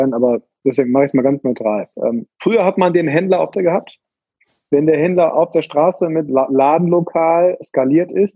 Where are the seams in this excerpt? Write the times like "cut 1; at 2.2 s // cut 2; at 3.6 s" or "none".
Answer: cut 1; at 1.9 s // cut 2; at 3.5 s // cut 3; at 6.3 s